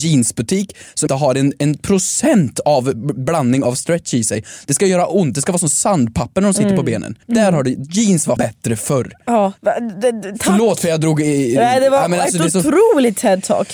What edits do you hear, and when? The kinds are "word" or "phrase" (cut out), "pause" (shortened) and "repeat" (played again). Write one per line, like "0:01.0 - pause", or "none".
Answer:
0:01.1 - word
0:07.2 - pause
0:08.4 - word
0:09.6 - pause